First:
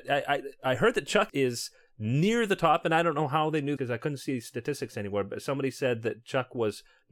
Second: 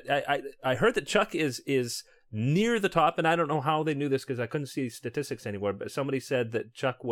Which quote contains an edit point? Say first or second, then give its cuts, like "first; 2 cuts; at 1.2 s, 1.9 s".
first; 2 cuts; at 1.3 s, 3.8 s